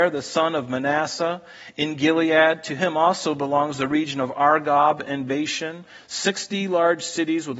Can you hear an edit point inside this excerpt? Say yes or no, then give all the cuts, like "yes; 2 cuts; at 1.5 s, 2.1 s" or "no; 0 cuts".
no; 0 cuts